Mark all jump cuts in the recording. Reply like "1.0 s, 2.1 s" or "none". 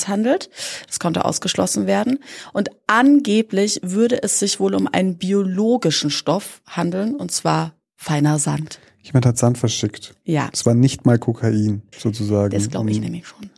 11.9 s

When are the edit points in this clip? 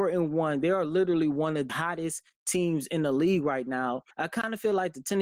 1.7 s, 4.1 s

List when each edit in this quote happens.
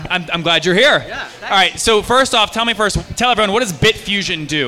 none

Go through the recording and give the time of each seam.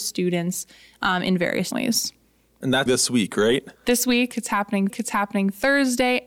1.7 s, 2.9 s, 3.7 s, 4.9 s

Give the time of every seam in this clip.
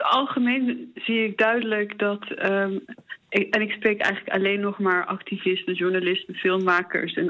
3.2 s

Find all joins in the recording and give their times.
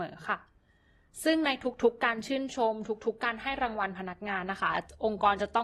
none

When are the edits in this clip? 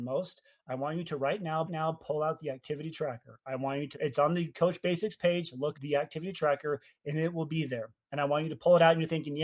1.7 s, 3.9 s, 5.7 s

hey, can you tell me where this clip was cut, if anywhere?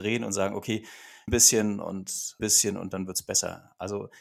1.3 s, 2.4 s

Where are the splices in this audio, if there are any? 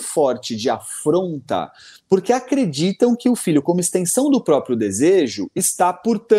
none

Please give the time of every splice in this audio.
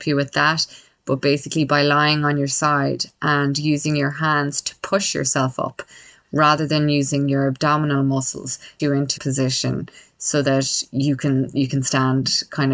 8.8 s, 9.2 s

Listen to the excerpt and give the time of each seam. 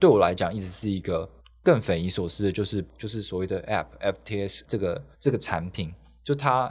1.4 s, 2.9 s, 3.7 s, 4.7 s, 5.1 s

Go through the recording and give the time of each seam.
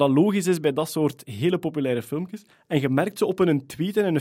2.5 s

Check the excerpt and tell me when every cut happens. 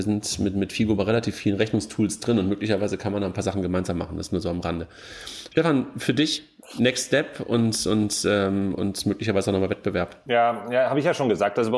none

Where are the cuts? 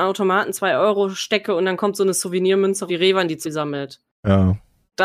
2.9 s, 3.4 s

